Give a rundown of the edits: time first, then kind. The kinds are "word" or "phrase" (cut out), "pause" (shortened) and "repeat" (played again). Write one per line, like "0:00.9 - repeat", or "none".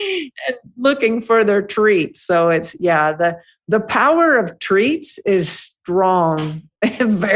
none